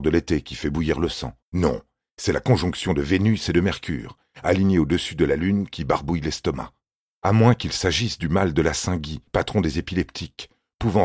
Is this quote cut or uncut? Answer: cut